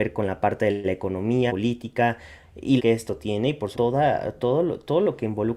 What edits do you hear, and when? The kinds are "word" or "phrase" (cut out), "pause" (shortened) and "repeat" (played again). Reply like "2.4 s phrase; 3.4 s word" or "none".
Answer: 1.5 s word; 2.8 s phrase; 3.7 s word